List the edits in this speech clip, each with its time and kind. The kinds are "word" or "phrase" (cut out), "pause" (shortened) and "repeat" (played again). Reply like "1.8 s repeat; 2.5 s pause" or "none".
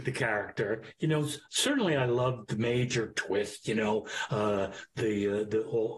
none